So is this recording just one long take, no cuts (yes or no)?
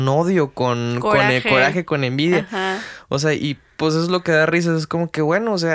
yes